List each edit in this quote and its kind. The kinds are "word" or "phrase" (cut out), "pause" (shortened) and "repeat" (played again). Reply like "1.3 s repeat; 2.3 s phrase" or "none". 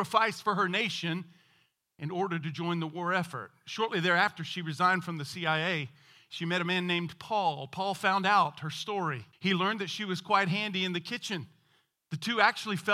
9.3 s pause